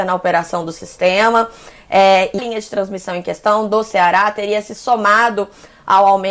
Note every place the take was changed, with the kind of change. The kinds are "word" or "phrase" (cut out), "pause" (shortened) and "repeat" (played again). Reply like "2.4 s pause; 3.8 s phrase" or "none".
2.4 s phrase